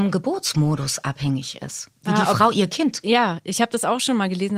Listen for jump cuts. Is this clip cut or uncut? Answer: cut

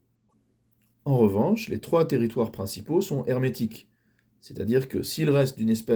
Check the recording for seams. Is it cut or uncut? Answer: uncut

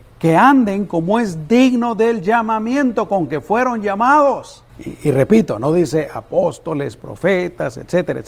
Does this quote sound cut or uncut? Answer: cut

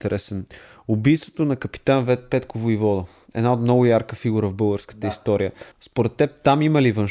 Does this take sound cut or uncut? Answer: cut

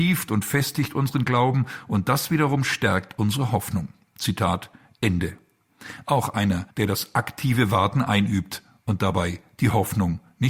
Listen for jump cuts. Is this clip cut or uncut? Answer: cut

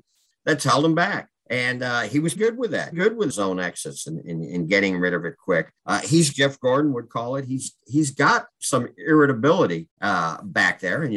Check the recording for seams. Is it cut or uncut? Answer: cut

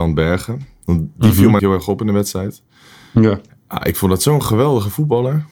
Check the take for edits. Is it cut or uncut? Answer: cut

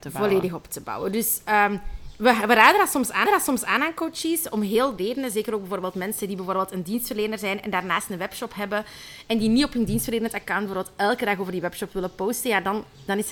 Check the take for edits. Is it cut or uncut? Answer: cut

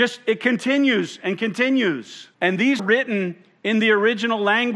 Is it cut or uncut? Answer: cut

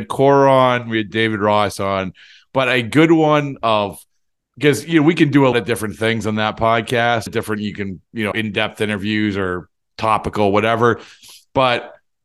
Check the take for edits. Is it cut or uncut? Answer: cut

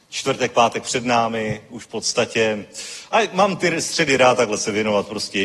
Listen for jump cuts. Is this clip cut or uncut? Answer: uncut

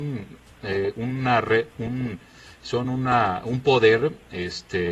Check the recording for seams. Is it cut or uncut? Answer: uncut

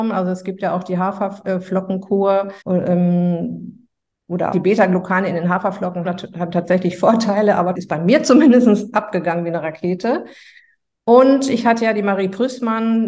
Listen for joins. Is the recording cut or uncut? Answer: cut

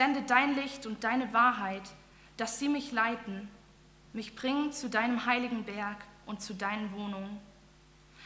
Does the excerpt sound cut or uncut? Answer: uncut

